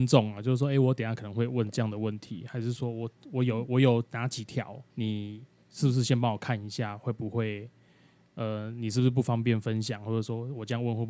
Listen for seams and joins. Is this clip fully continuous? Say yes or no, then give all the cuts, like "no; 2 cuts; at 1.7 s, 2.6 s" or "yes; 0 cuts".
no; 1 cut; at 4.9 s